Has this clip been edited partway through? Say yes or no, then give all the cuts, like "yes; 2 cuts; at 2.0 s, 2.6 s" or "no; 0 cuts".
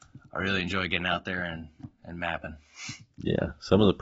no; 0 cuts